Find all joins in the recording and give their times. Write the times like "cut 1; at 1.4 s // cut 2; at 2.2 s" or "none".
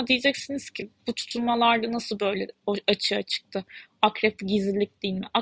none